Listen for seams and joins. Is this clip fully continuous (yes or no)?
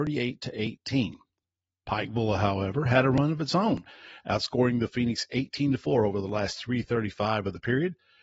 yes